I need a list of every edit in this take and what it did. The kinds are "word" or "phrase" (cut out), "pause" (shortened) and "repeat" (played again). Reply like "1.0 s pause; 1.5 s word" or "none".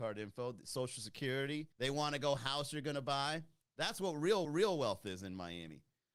1.7 s pause; 2.4 s phrase; 3.6 s pause; 4.4 s repeat